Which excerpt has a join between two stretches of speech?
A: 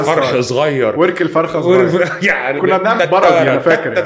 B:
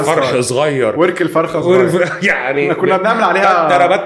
A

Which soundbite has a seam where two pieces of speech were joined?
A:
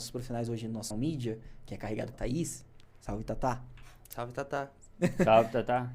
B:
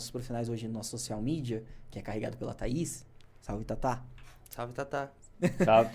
A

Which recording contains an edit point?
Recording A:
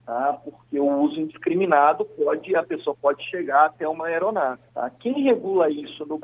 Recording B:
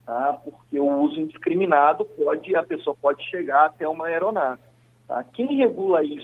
A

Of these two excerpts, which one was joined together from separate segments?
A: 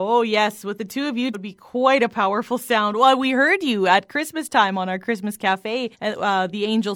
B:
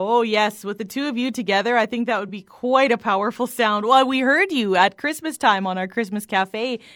A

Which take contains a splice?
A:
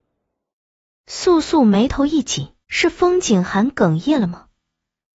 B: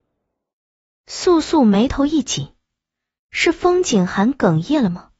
A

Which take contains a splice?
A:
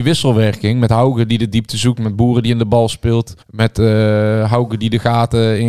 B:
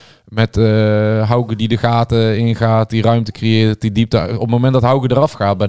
A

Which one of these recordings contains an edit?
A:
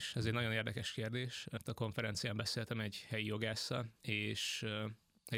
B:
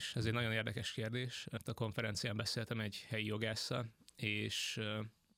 A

